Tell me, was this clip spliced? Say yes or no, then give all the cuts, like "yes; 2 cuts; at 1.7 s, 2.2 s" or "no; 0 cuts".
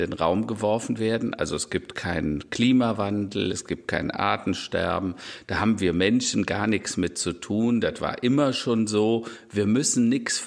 no; 0 cuts